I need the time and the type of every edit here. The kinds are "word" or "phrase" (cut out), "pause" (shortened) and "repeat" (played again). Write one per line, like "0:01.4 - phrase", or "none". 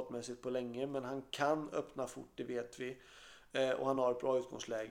none